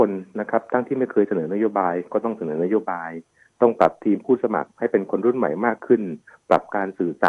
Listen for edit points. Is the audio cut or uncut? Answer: uncut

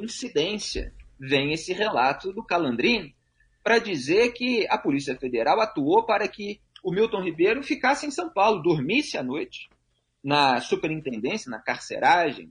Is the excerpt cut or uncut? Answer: uncut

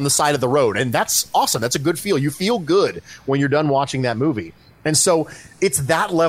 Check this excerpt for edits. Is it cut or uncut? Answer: uncut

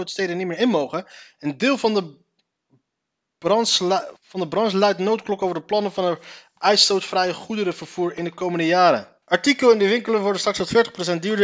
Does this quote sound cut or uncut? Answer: cut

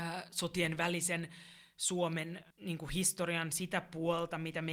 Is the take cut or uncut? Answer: cut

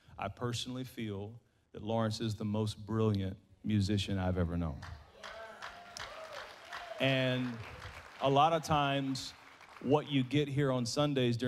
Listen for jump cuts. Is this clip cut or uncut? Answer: uncut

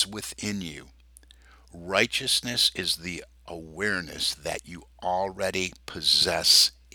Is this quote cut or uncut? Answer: uncut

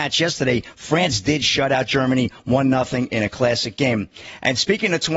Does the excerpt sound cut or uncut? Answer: uncut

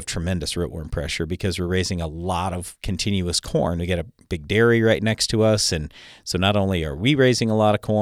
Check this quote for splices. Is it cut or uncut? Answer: uncut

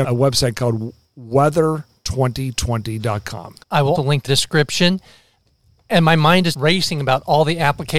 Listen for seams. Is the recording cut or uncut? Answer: cut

